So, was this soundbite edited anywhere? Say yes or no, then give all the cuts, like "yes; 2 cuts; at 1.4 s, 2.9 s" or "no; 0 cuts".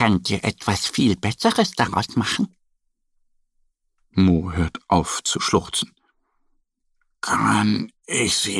no; 0 cuts